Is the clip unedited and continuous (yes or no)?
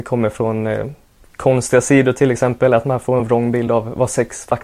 yes